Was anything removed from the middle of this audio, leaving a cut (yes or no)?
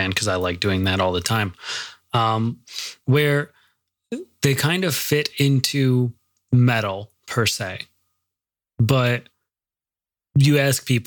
no